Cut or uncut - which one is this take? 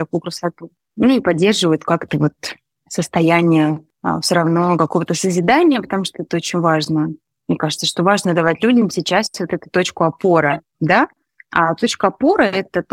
uncut